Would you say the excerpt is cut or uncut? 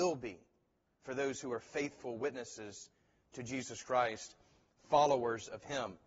uncut